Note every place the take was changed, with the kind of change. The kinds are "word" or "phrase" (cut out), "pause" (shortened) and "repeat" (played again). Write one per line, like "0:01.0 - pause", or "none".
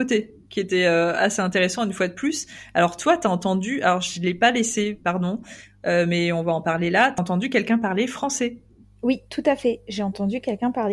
none